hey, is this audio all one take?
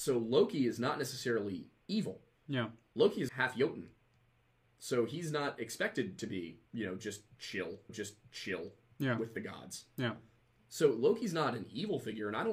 no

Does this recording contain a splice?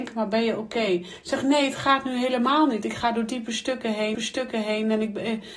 yes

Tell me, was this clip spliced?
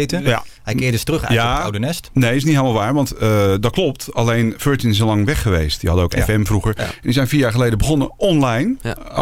no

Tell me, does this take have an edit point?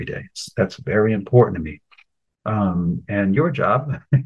no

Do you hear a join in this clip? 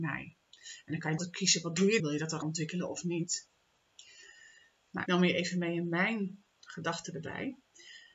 yes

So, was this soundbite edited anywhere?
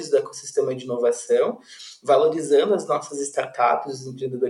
no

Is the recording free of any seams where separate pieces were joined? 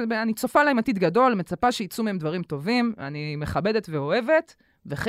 yes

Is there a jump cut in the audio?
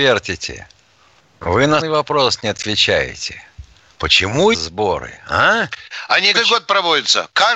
yes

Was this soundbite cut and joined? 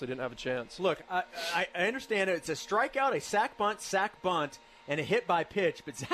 no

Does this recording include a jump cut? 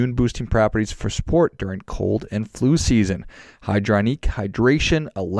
no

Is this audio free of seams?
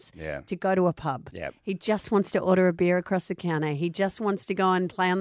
yes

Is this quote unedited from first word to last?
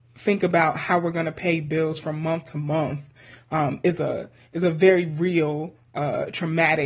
yes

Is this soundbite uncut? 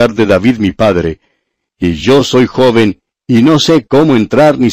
yes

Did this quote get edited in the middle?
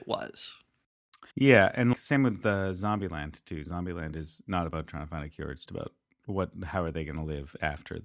yes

